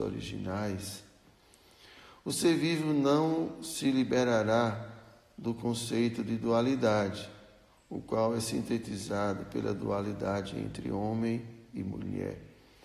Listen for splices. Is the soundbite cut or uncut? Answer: uncut